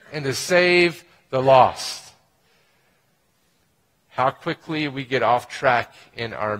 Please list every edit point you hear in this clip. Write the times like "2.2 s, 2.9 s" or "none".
none